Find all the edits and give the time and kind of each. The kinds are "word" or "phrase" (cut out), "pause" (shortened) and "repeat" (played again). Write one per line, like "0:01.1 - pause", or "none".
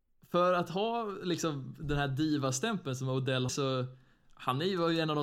0:03.5 - word